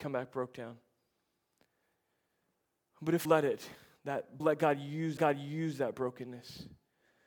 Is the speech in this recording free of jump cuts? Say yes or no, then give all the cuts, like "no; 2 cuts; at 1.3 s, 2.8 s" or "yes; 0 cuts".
no; 3 cuts; at 3.3 s, 4.4 s, 5.2 s